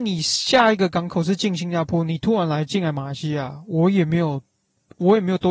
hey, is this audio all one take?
yes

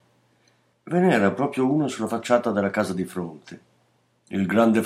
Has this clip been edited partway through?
no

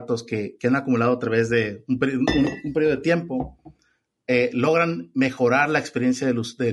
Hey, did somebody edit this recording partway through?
no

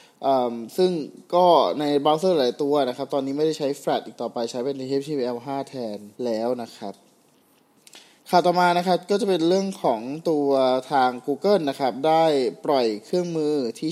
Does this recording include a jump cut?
yes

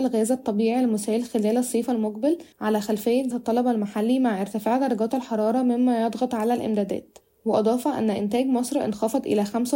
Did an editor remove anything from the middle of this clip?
yes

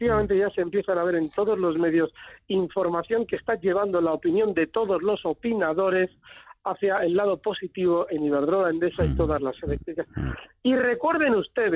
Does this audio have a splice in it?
no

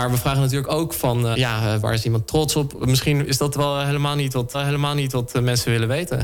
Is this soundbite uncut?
no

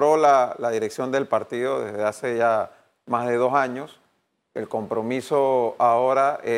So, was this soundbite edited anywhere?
no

